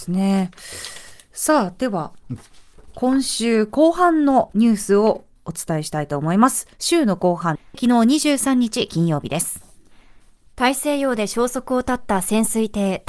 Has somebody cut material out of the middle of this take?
no; 0 cuts

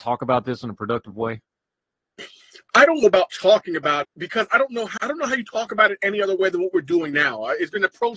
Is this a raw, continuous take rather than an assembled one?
no; 3 cuts; at 3.0 s, 4.0 s, 5.0 s

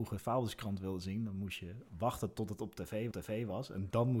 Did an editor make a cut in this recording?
yes; 1 cut; at 3.1 s

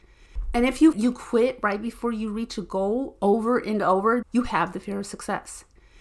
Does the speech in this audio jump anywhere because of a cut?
yes; 2 cuts; at 0.9 s, 4.2 s

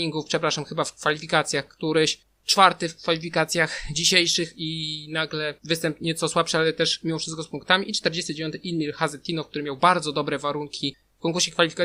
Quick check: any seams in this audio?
yes; 1 cut; at 5.6 s

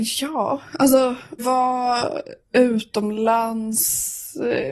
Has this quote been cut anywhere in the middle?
yes; 2 cuts; at 1.4 s, 2.4 s

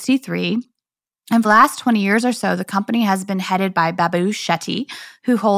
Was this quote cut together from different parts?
yes; 1 cut; at 1.4 s

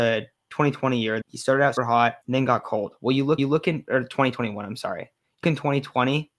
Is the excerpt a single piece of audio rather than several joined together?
no; 5 cuts; at 1.2 s, 1.8 s, 2.2 s, 3.4 s, 5.4 s

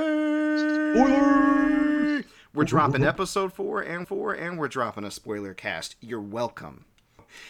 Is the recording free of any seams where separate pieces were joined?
no; 1 cut; at 4.0 s

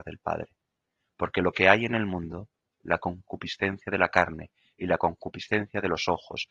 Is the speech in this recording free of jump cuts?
yes; 0 cuts

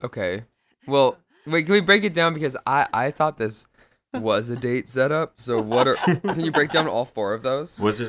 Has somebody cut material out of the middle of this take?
no; 0 cuts

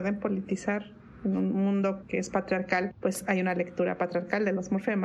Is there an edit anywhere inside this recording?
no; 0 cuts

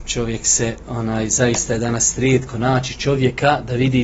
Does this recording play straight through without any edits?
yes; 0 cuts

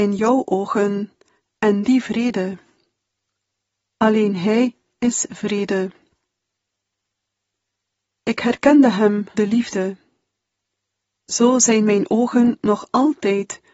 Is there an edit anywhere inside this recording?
yes; 1 cut; at 9.3 s

